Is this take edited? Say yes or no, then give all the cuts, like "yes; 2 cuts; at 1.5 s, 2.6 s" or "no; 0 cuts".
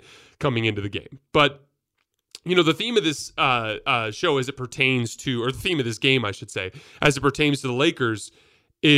no; 0 cuts